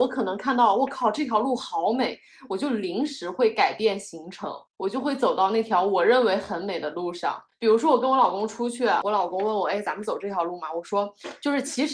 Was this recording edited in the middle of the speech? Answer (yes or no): yes